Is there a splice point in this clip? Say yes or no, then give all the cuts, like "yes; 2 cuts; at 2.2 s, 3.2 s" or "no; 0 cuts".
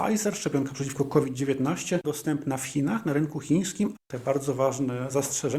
yes; 2 cuts; at 2.0 s, 4.0 s